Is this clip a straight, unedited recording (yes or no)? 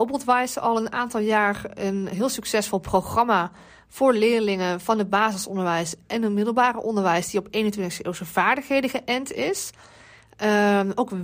yes